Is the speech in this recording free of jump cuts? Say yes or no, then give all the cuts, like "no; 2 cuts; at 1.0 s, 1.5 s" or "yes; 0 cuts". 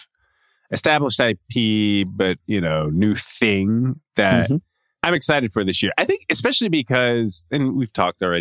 yes; 0 cuts